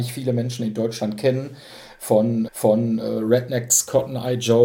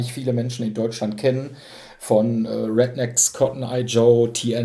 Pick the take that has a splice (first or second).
first